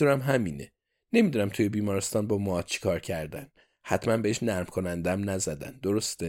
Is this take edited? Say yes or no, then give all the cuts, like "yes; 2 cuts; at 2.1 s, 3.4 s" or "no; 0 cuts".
no; 0 cuts